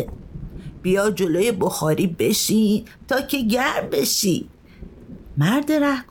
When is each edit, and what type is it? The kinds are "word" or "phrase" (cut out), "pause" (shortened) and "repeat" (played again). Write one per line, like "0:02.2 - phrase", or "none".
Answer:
none